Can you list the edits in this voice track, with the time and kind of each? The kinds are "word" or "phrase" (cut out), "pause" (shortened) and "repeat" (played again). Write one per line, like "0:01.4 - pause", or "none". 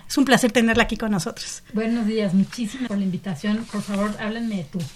0:02.9 - word